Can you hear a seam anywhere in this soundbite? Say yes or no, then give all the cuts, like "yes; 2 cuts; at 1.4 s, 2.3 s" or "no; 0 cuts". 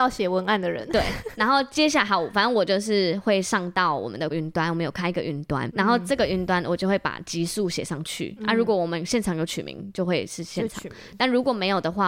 yes; 2 cuts; at 4.3 s, 5.7 s